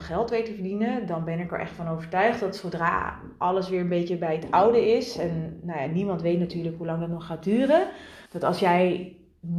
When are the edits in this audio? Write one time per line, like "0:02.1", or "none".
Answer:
0:08.3